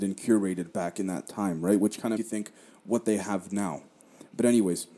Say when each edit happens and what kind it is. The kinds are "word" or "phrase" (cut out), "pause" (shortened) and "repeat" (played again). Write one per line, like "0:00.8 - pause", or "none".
0:02.2 - word